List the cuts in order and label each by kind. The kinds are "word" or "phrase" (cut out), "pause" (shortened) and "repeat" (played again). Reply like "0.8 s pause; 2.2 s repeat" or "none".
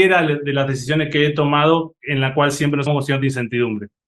2.9 s word